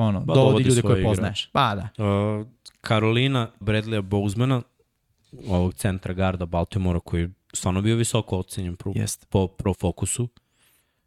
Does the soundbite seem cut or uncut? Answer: cut